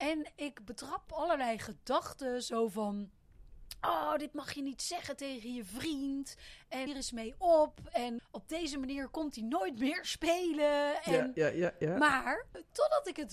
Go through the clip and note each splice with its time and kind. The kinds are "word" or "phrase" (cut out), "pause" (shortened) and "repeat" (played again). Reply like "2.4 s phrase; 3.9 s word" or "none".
1.1 s phrase; 6.9 s phrase; 8.2 s word